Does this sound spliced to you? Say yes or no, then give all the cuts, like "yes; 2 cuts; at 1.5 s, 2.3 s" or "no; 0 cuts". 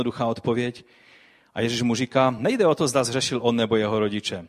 no; 0 cuts